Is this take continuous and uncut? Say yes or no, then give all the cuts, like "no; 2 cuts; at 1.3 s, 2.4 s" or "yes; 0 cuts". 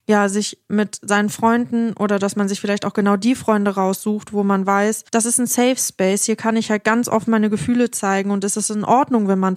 no; 1 cut; at 5.1 s